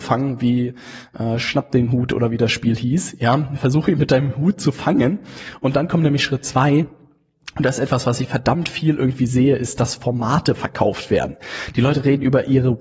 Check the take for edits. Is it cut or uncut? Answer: uncut